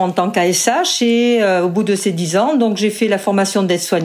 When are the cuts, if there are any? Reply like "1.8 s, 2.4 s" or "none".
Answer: none